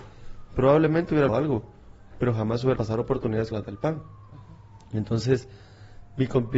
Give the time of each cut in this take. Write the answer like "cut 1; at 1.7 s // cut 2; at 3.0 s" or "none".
cut 1; at 1.3 s // cut 2; at 2.8 s // cut 3; at 3.5 s